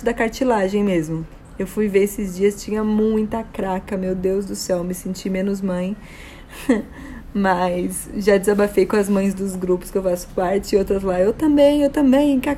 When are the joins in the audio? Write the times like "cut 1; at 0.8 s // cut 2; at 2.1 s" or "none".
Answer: none